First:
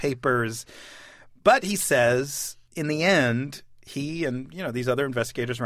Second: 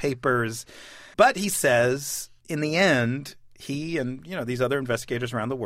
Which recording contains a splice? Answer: second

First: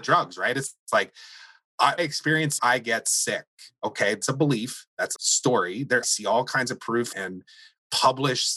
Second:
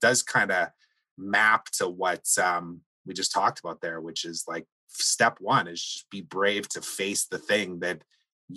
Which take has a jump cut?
first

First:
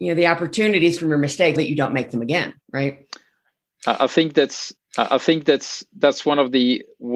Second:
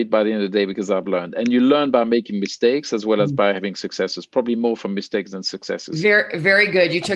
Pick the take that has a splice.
first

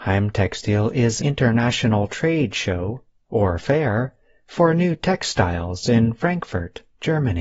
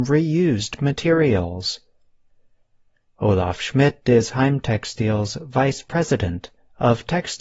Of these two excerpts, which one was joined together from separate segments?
first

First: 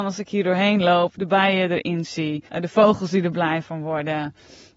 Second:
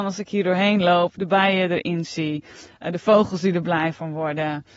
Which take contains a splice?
first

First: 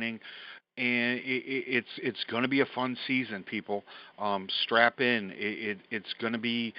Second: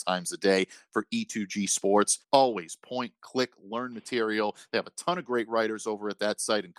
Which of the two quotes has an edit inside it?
second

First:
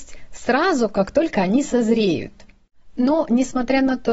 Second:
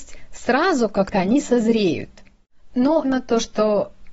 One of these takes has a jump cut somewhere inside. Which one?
second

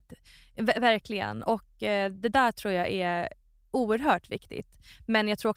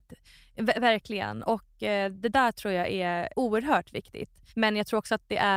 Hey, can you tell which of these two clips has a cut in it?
second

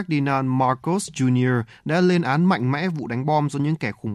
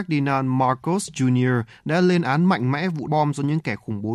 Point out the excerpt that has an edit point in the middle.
second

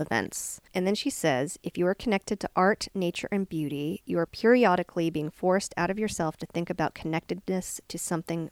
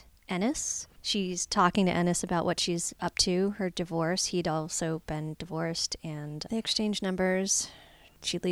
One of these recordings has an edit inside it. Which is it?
second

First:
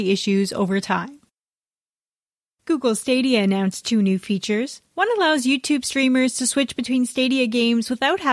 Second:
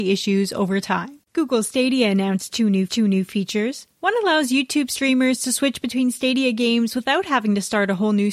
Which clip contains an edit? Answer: second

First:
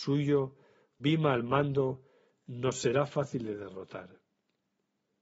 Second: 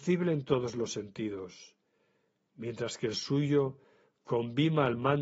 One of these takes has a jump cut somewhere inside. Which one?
first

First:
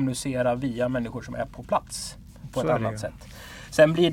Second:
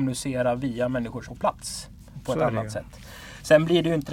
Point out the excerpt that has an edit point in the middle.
second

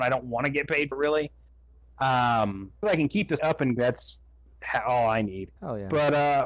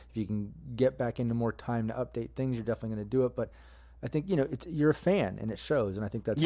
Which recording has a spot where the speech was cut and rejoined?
first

